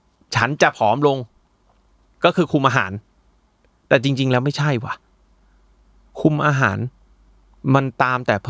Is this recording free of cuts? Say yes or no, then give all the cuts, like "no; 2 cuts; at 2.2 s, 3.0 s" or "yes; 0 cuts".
yes; 0 cuts